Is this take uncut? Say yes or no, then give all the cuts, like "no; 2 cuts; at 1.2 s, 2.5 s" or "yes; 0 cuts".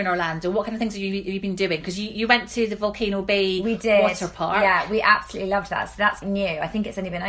no; 1 cut; at 6.2 s